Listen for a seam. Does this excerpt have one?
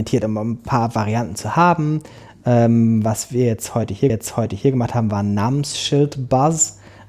yes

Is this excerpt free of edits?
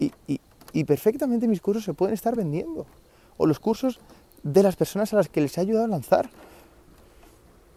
yes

